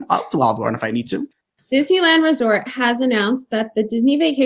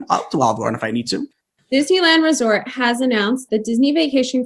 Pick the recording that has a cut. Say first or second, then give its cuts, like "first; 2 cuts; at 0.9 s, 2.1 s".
second; 1 cut; at 3.5 s